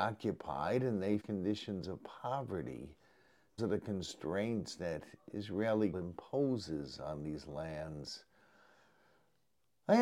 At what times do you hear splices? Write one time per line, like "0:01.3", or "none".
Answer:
0:01.2
0:03.6
0:05.9